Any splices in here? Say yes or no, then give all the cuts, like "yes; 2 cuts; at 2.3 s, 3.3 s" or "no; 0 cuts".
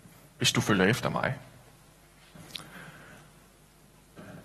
no; 0 cuts